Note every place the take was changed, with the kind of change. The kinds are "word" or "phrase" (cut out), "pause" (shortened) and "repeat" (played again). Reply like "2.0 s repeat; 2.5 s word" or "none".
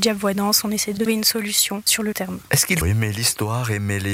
1.1 s word; 2.1 s word; 2.8 s word